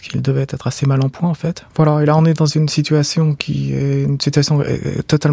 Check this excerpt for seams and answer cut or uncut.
cut